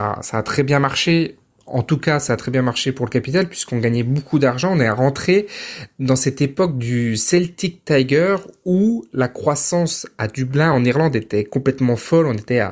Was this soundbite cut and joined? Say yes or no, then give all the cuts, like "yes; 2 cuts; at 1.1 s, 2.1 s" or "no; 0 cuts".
no; 0 cuts